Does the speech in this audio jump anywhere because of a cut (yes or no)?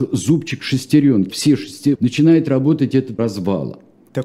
yes